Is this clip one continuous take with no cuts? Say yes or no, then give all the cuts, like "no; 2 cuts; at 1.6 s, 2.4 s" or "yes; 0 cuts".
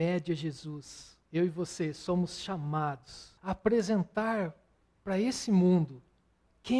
no; 2 cuts; at 1.2 s, 3.4 s